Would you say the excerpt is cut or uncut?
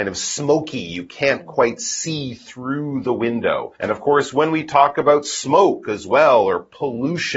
cut